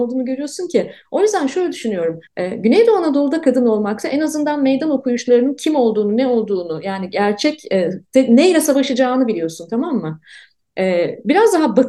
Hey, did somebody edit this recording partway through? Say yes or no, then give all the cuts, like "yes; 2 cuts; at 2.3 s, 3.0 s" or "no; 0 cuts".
yes; 1 cut; at 2.3 s